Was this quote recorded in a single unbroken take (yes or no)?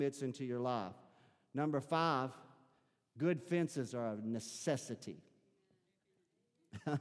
yes